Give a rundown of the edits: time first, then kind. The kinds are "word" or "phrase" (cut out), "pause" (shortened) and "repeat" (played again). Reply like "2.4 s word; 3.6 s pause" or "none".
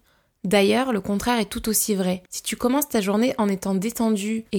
2.3 s pause